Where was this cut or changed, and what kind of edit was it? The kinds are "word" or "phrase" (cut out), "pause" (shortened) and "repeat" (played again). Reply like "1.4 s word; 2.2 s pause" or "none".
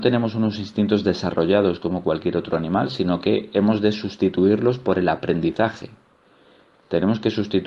none